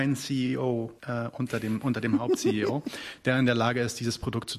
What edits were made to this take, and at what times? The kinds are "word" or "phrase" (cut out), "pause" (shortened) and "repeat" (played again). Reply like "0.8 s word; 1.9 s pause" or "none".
1.0 s pause

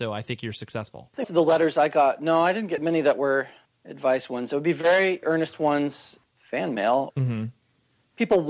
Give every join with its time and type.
1.2 s word; 5.2 s word; 7.1 s word

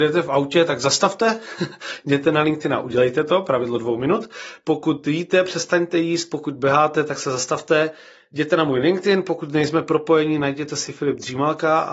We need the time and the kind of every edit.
none

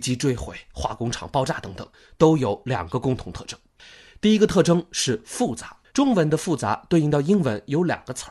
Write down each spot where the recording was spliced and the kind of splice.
5.8 s pause

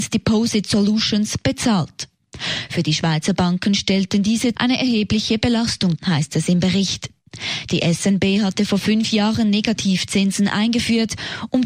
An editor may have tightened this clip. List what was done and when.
4.5 s word; 6.0 s word

